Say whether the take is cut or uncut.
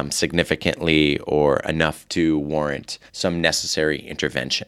cut